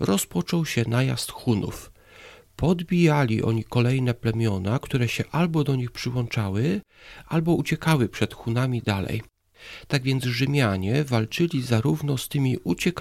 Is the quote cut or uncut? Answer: uncut